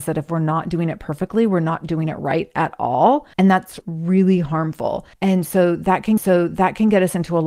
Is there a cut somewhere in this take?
yes; 4 cuts; at 3.3 s, 3.8 s, 5.1 s, 6.2 s

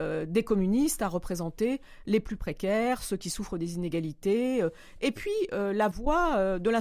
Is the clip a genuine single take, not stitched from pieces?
yes; 0 cuts

